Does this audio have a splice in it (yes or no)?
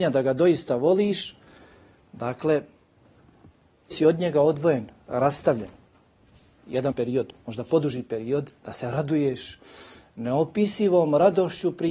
yes